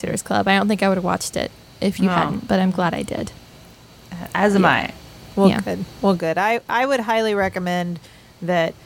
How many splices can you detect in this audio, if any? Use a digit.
0